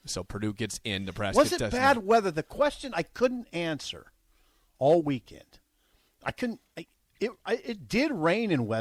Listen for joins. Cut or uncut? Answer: uncut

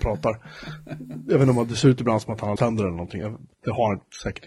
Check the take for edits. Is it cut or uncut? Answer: cut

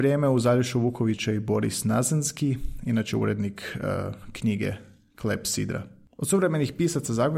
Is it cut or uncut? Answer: uncut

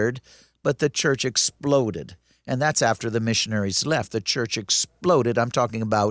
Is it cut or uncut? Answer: uncut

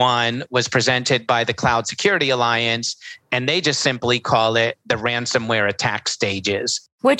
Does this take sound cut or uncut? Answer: uncut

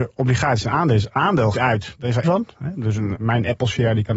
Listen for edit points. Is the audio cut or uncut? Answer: cut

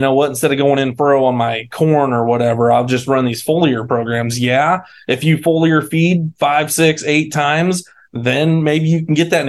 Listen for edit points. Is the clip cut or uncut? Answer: uncut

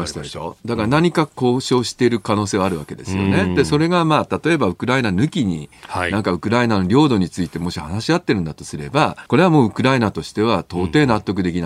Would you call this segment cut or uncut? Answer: cut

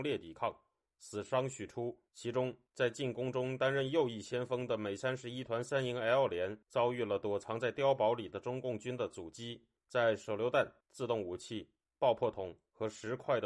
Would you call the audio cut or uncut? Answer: cut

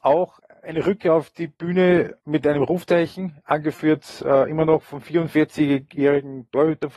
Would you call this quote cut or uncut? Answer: uncut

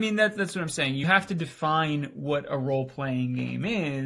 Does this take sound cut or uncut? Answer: cut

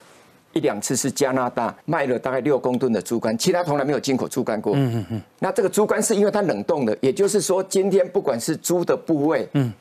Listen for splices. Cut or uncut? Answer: cut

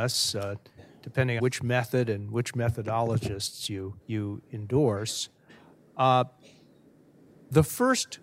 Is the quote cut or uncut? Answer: cut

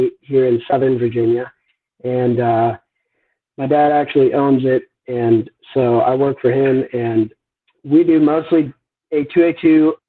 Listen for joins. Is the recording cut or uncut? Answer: uncut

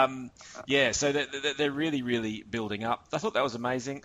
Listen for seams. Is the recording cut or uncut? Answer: uncut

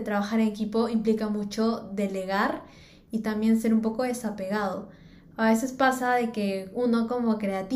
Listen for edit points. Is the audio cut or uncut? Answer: uncut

